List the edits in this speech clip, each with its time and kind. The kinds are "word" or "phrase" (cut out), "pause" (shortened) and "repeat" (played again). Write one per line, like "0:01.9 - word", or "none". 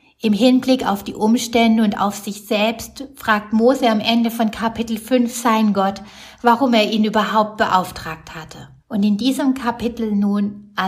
0:08.8 - pause